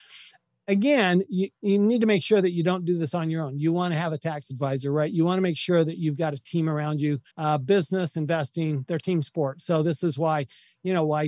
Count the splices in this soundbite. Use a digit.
1